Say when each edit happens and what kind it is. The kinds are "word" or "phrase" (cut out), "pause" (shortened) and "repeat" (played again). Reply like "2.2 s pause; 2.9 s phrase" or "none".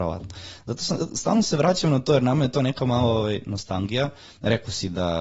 none